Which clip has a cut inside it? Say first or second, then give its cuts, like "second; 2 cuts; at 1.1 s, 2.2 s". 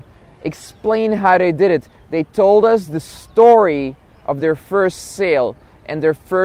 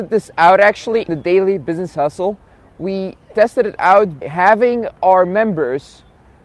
second; 2 cuts; at 1.1 s, 4.2 s